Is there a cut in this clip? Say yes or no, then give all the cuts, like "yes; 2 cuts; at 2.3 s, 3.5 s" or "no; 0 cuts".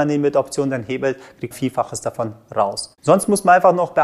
yes; 2 cuts; at 1.5 s, 3.0 s